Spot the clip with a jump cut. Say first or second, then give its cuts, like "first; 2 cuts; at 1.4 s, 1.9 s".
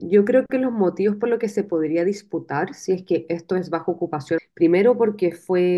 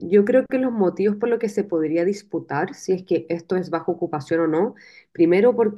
first; 1 cut; at 4.4 s